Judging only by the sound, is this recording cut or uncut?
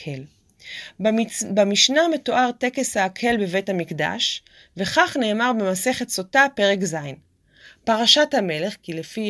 uncut